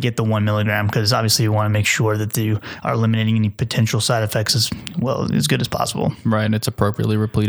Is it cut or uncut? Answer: uncut